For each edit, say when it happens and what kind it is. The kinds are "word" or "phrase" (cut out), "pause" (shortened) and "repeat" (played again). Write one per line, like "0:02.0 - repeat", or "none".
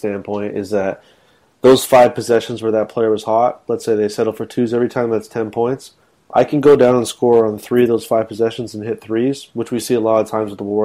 none